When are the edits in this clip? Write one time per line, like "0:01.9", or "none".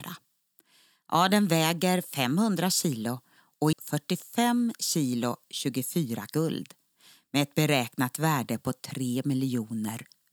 0:03.7
0:06.3